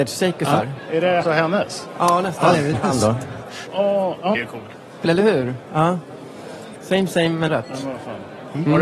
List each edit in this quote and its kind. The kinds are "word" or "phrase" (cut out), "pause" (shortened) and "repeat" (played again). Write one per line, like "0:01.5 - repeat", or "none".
0:01.2 - word
0:02.7 - phrase
0:04.3 - phrase
0:05.0 - phrase
0:07.5 - word

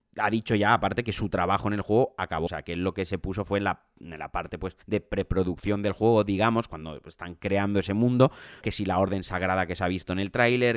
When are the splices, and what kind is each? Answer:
0:02.5 - phrase
0:04.8 - pause
0:08.6 - word

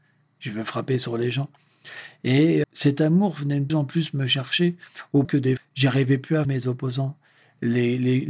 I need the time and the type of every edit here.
0:02.6 - word
0:03.7 - word
0:05.2 - word
0:05.6 - word
0:06.4 - word

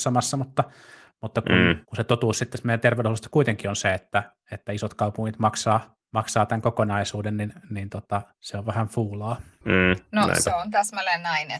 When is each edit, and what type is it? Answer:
0:01.8 - pause
0:06.0 - pause
0:08.3 - pause

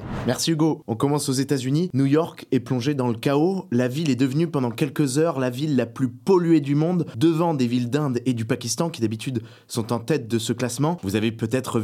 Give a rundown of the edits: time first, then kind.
none

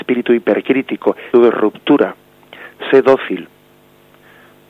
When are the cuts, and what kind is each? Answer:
0:01.3 - word

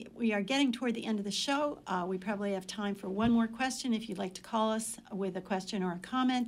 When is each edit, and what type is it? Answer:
none

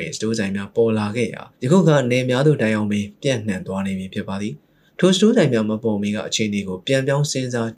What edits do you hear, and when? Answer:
0:01.5 - pause

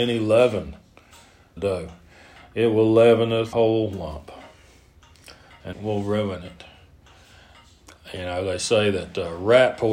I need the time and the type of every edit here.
0:01.6 - phrase
0:03.5 - word
0:05.7 - phrase

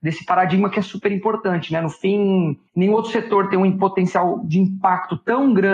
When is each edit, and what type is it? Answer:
0:02.7 - pause

